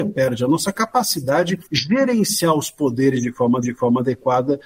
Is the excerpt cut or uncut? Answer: cut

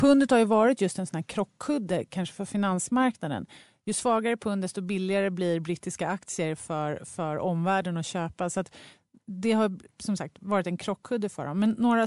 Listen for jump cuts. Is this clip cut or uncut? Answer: uncut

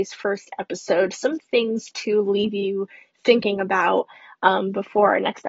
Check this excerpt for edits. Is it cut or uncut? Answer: uncut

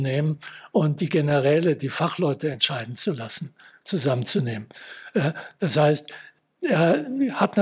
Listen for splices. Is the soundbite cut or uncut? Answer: uncut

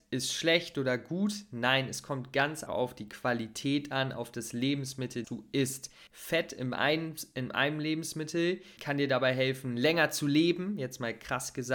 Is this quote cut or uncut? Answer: cut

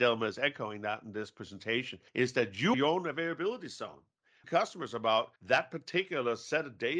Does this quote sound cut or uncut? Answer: cut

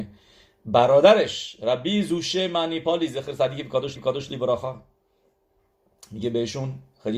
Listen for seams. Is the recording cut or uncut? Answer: cut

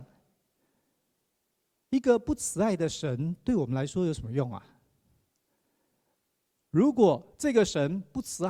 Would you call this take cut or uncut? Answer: cut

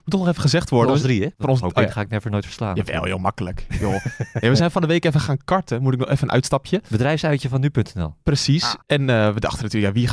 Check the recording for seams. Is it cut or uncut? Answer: cut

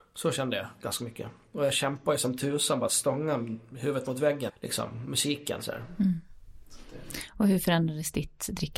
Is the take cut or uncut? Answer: cut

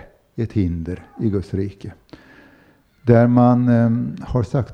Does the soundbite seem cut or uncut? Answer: uncut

